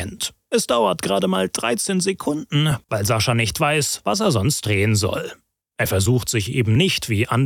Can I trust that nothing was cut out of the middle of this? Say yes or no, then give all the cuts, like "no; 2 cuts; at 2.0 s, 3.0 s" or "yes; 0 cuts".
yes; 0 cuts